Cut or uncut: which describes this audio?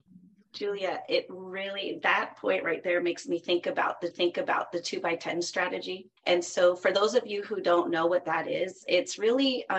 cut